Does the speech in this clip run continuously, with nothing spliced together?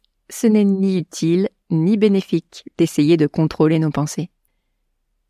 yes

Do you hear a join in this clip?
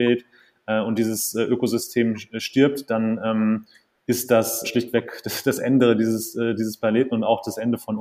yes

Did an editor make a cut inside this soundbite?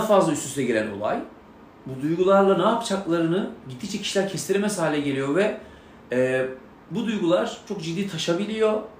no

